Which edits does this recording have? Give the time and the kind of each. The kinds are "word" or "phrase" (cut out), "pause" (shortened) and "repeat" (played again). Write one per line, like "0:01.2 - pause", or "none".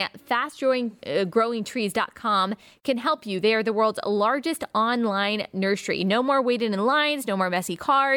none

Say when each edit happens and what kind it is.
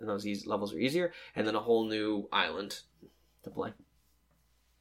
none

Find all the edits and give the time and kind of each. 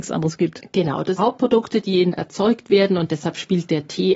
0:01.2 - phrase
0:02.1 - phrase

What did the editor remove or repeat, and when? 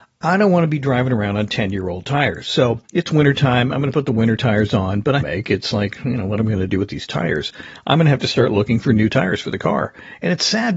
0:02.8 - pause
0:05.2 - phrase

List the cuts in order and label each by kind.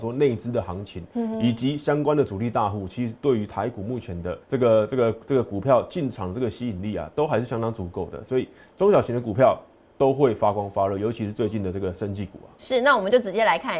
0:04.4 - pause

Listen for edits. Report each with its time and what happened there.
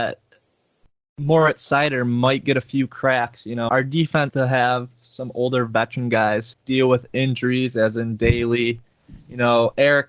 0:03.7 - word
0:04.3 - word
0:06.5 - word

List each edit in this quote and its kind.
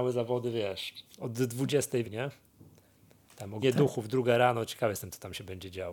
0:02.0 - word
0:03.6 - word

